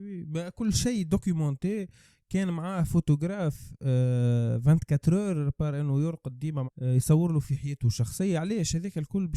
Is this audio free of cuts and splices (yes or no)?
no